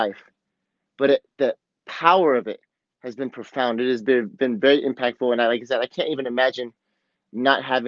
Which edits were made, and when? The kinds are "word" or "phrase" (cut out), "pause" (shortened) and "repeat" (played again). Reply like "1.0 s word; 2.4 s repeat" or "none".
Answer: none